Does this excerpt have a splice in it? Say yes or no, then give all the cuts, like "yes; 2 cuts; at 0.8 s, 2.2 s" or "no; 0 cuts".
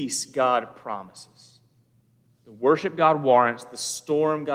no; 0 cuts